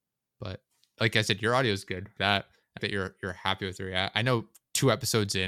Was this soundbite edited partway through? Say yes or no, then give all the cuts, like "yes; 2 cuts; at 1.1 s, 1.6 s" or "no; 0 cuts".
yes; 2 cuts; at 2.2 s, 2.8 s